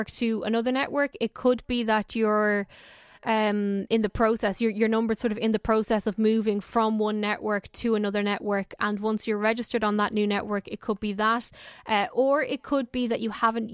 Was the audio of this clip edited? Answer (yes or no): no